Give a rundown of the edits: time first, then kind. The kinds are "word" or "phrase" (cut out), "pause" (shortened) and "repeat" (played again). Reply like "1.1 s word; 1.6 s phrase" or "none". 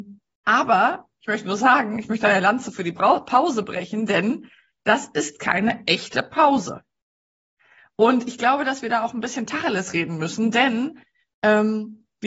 none